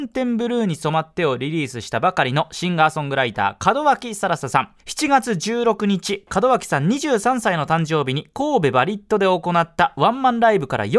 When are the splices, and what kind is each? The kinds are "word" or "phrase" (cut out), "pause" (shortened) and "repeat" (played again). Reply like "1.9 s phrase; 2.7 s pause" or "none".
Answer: 4.8 s pause